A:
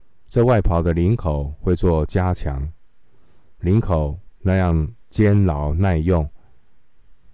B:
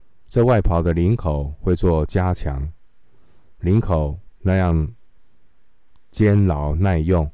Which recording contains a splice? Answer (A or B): A